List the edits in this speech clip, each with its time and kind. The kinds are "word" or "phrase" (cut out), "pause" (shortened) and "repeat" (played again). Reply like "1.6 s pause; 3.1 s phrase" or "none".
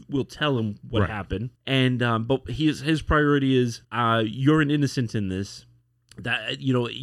1.5 s pause; 3.8 s pause; 5.8 s pause

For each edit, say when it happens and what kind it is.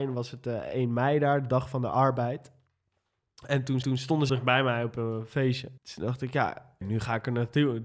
3.8 s repeat; 4.3 s word; 5.8 s pause; 6.8 s word

